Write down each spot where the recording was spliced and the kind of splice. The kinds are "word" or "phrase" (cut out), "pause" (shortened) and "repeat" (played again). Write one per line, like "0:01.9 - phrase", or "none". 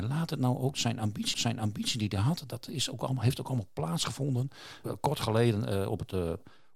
0:01.3 - repeat